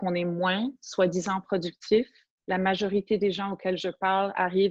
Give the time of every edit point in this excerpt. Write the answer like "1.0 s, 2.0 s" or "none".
none